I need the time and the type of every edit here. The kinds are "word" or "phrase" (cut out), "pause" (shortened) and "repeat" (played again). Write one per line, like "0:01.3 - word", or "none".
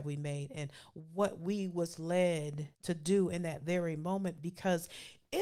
0:02.7 - pause